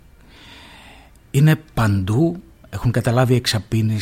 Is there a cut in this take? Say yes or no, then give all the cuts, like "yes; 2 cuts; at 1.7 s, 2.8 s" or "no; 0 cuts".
no; 0 cuts